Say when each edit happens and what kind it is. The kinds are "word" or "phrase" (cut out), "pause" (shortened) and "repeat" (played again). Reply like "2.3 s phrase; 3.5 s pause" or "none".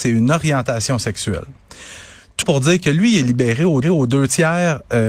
2.4 s word; 3.8 s repeat